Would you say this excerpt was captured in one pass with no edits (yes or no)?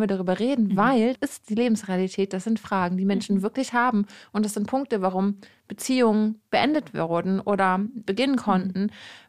no